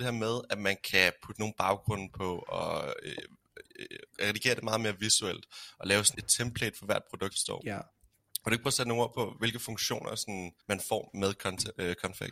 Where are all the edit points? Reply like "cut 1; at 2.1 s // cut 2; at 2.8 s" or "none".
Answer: cut 1; at 6.1 s // cut 2; at 7.3 s // cut 3; at 10.6 s